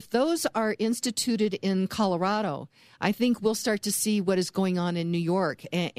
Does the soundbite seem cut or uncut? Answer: uncut